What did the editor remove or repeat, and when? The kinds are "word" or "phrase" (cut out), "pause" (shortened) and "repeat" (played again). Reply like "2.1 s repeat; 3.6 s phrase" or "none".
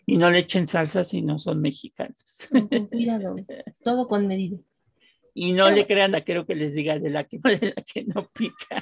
6.1 s word; 7.4 s word